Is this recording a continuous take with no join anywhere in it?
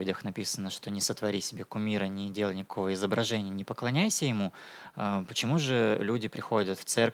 yes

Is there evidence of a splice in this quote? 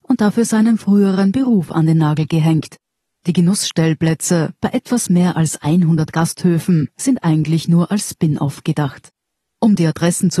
no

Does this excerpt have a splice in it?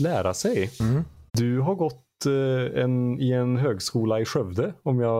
yes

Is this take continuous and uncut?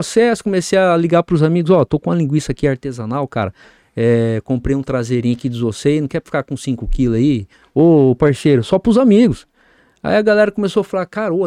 yes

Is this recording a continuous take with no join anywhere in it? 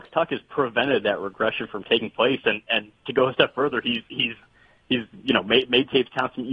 yes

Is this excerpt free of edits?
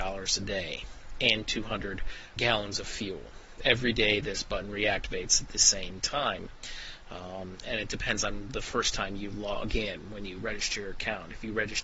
no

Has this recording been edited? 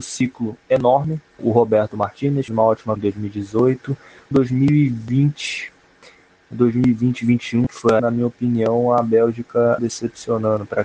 yes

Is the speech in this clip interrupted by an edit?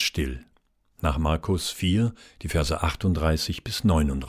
no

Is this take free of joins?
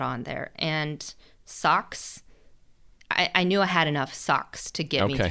yes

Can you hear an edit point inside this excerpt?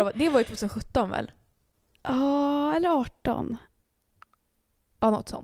no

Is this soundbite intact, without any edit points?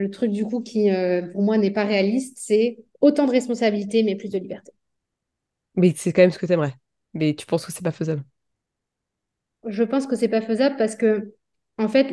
no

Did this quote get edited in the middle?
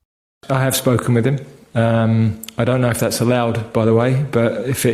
no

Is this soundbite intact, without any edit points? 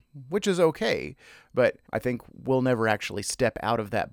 no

